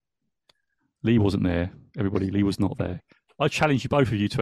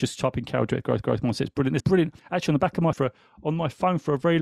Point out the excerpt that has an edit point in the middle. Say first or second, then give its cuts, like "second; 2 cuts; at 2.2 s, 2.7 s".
second; 4 cuts; at 1.0 s, 1.8 s, 2.2 s, 2.9 s